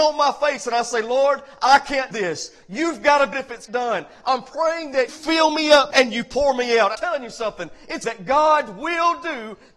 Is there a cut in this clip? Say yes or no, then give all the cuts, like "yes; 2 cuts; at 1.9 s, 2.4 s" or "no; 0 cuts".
yes; 7 cuts; at 2.1 s, 3.3 s, 3.7 s, 5.1 s, 5.9 s, 6.9 s, 8.0 s